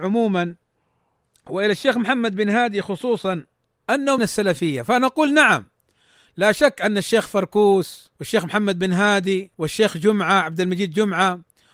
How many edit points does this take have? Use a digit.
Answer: 3